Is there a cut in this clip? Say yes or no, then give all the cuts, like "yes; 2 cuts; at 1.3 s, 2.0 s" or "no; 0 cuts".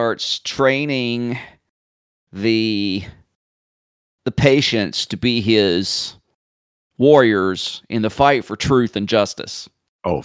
no; 0 cuts